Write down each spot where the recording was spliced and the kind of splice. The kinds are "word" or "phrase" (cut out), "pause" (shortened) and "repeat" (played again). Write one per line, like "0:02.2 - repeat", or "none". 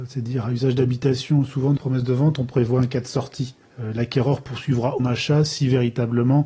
0:01.8 - word
0:03.6 - pause
0:05.0 - phrase